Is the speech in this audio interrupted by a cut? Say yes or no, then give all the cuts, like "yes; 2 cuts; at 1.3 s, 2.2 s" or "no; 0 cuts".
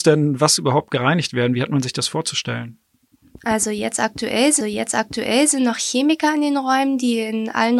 yes; 1 cut; at 4.6 s